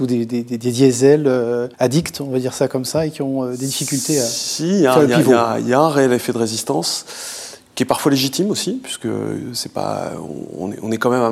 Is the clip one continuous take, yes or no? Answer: no